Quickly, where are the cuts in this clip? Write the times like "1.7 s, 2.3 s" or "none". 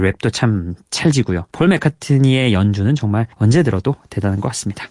1.5 s, 3.3 s